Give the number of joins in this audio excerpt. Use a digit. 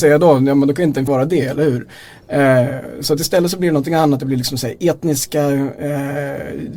1